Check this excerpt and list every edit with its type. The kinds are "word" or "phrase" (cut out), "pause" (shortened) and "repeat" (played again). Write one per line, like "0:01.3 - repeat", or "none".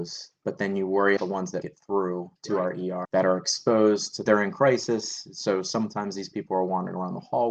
0:01.2 - word
0:01.6 - word
0:02.4 - pause
0:03.0 - word
0:04.3 - phrase